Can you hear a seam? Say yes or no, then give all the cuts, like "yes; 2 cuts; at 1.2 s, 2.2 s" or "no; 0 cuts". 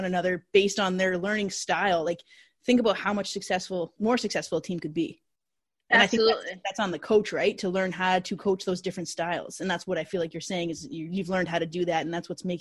no; 0 cuts